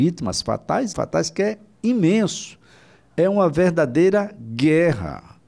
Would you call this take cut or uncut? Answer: cut